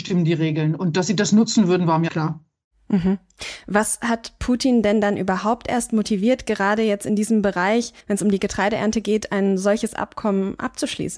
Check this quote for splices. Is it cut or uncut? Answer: cut